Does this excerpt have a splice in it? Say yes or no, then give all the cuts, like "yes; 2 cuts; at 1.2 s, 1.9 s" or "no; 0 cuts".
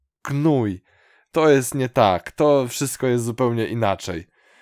no; 0 cuts